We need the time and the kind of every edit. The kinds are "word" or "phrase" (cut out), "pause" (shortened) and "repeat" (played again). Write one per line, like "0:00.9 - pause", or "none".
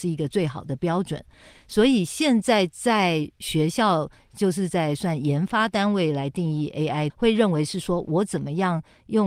0:07.1 - phrase